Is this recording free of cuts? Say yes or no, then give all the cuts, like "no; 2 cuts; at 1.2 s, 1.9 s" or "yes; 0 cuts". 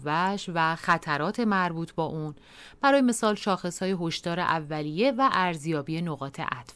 yes; 0 cuts